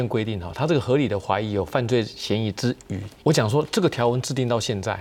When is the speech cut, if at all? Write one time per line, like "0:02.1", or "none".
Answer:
0:03.2